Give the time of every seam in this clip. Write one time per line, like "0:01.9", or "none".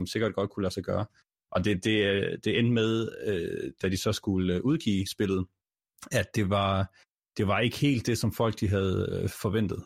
none